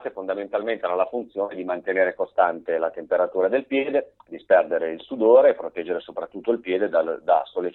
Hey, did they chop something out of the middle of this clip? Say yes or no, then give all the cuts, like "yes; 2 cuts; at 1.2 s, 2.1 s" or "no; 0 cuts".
no; 0 cuts